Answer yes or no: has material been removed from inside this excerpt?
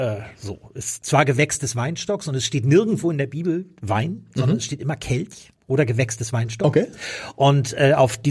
no